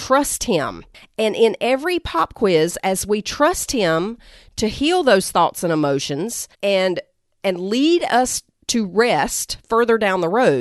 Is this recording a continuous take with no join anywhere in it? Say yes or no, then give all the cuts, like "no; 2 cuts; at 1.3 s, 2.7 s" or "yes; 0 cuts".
no; 1 cut; at 6.5 s